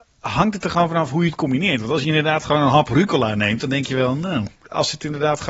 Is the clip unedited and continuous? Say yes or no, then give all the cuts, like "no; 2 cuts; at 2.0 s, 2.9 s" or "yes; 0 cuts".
yes; 0 cuts